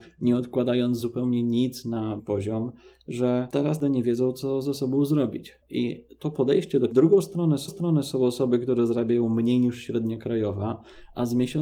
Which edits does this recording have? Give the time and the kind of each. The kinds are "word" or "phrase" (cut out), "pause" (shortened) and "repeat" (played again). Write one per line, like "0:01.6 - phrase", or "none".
0:01.0 - word
0:02.2 - phrase
0:05.6 - pause
0:06.9 - phrase
0:07.7 - repeat